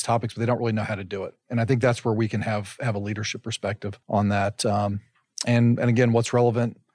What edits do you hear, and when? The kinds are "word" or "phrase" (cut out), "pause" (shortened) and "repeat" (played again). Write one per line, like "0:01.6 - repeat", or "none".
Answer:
0:04.0 - pause